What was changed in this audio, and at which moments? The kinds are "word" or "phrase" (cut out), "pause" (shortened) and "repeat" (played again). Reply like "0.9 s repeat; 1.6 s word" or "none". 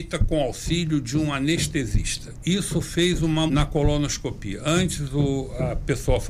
3.5 s phrase